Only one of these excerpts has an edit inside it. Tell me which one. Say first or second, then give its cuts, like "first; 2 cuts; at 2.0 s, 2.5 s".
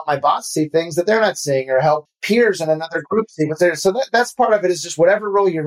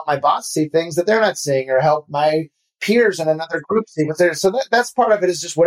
first; 1 cut; at 2.1 s